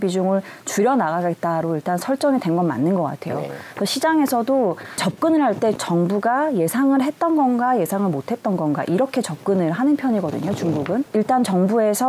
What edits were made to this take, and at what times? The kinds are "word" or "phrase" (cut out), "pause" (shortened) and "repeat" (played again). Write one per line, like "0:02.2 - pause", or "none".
0:05.8 - word